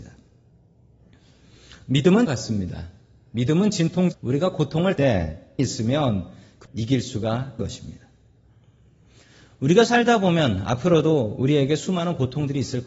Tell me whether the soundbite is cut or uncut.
cut